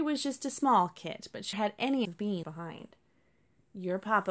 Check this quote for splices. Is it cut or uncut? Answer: cut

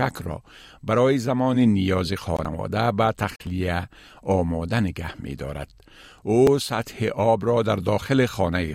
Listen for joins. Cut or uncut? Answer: uncut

